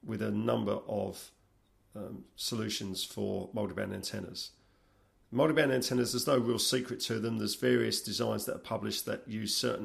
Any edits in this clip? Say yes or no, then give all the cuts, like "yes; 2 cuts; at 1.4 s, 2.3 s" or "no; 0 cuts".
no; 0 cuts